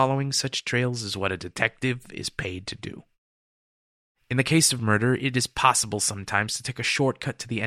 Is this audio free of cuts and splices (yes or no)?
yes